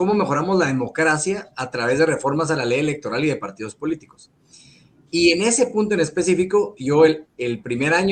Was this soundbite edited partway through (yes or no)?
no